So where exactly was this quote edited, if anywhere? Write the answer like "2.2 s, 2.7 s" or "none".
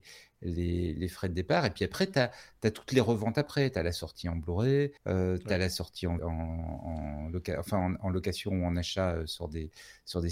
5.0 s, 6.2 s